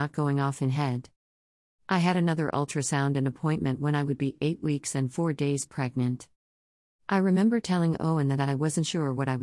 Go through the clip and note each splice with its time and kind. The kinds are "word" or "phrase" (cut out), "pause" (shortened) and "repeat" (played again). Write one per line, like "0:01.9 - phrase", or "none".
none